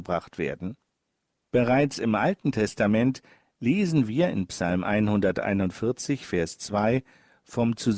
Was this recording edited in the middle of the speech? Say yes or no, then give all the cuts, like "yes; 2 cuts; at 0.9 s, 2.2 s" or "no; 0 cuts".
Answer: no; 0 cuts